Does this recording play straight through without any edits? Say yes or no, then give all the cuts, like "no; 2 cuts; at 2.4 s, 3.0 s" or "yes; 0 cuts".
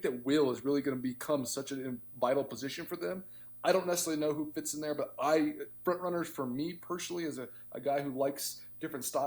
yes; 0 cuts